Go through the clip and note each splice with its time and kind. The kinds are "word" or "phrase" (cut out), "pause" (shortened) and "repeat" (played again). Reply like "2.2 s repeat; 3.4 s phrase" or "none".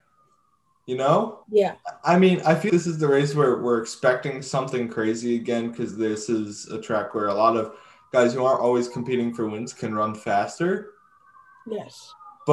1.4 s pause; 2.7 s word